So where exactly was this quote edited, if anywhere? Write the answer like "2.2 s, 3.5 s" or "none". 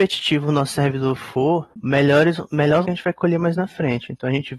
1.7 s, 2.8 s